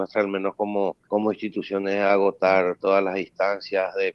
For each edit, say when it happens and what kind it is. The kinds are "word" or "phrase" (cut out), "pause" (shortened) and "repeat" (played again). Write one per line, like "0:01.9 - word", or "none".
0:01.0 - pause